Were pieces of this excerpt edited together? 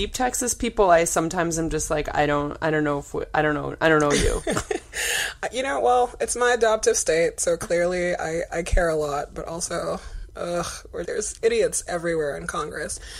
yes; 1 cut; at 11.0 s

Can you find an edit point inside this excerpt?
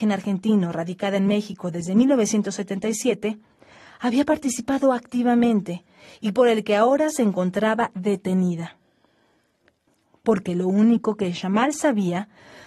no; 0 cuts

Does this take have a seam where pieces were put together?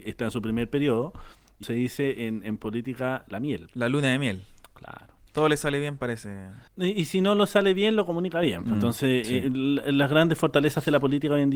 yes; 4 cuts; at 1.6 s, 5.3 s, 6.7 s, 9.2 s

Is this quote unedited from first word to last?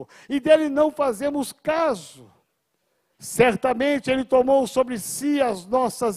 yes; 0 cuts

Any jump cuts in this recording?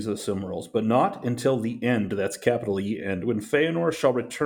no; 0 cuts

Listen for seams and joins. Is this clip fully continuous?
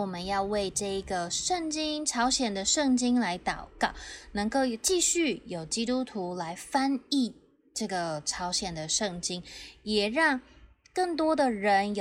yes; 0 cuts

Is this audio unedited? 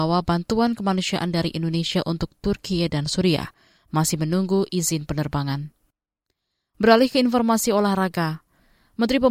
yes; 0 cuts

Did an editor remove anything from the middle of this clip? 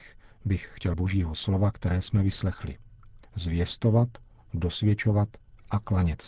yes; 2 cuts; at 0.9 s, 3.2 s

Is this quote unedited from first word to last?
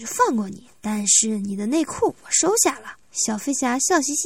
no; 1 cut; at 3.0 s

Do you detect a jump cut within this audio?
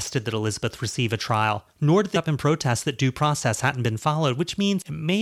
yes; 1 cut; at 2.1 s

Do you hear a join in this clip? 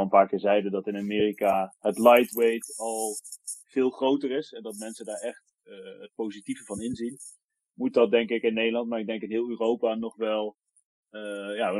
no; 0 cuts

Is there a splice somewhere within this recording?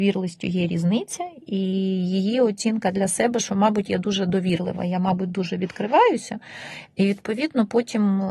no; 0 cuts

